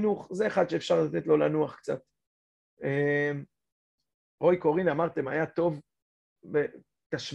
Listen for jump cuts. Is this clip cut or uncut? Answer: uncut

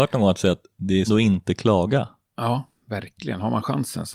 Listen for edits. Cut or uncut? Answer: cut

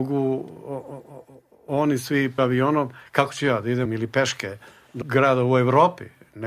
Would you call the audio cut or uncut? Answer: cut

